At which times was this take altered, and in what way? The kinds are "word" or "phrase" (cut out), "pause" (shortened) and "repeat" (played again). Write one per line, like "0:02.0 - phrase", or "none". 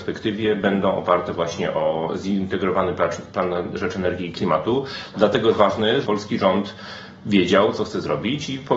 0:06.0 - word